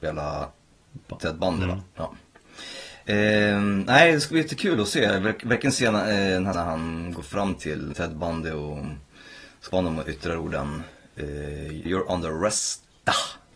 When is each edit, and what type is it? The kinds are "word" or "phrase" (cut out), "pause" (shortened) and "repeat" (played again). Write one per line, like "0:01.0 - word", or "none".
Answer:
0:01.9 - pause
0:06.5 - word
0:07.9 - word
0:09.7 - word
0:11.9 - word

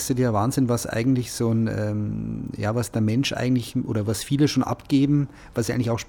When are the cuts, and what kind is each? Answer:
none

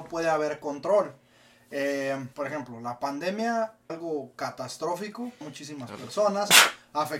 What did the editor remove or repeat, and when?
0:02.3 - pause
0:03.9 - word
0:05.4 - phrase

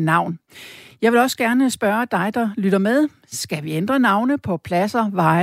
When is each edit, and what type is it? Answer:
none

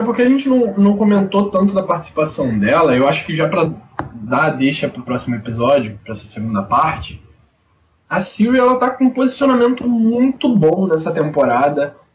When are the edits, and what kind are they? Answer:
none

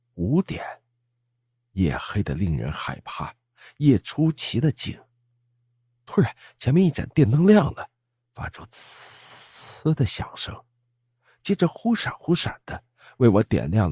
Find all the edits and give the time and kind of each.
none

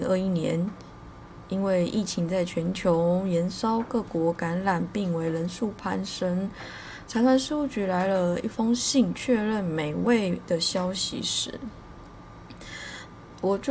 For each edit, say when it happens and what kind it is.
0:10.5 - word

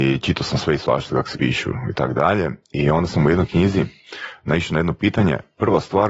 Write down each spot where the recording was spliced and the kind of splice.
0:01.3 - word

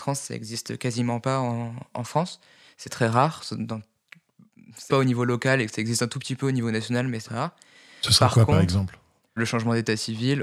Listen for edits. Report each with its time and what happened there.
0:02.9 - word
0:04.9 - word
0:07.2 - word
0:09.4 - word

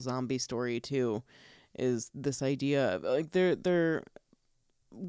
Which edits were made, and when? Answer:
none

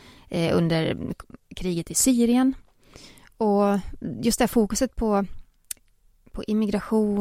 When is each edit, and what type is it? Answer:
none

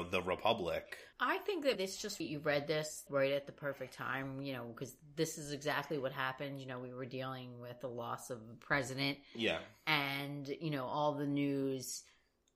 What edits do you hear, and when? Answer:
0:01.1 - pause
0:01.8 - word
0:02.2 - word
0:03.1 - word

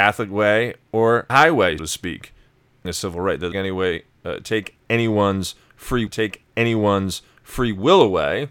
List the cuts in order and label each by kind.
0:01.3 - word
0:01.8 - word
0:02.8 - phrase
0:03.5 - phrase
0:06.1 - repeat

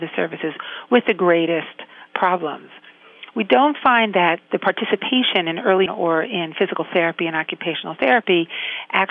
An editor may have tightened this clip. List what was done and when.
0:05.9 - word

